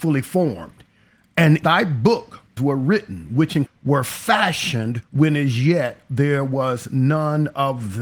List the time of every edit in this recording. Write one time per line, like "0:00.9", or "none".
0:01.6
0:02.6
0:03.7
0:05.0